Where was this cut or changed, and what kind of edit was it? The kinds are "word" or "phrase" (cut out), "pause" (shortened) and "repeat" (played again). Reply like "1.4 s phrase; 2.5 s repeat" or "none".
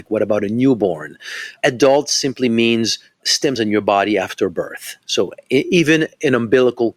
3.6 s word